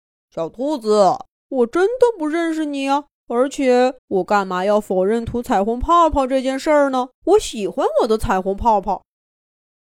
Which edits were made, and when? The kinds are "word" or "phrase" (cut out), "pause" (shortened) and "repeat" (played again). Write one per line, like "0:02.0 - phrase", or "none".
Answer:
0:01.3 - pause
0:03.2 - pause
0:04.0 - pause
0:07.1 - pause